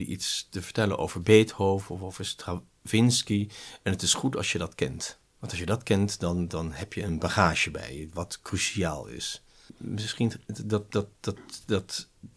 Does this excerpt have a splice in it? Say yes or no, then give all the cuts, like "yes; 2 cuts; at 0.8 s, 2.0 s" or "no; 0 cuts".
yes; 1 cut; at 5.3 s